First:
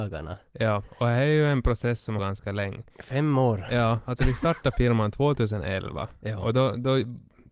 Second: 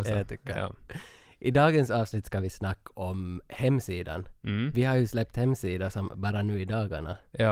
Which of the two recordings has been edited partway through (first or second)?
first